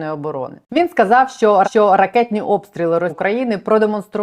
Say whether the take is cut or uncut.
cut